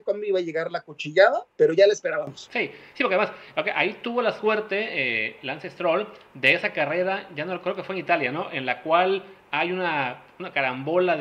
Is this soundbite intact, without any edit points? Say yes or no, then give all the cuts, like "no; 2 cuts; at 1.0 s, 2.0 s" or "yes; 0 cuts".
no; 1 cut; at 1.5 s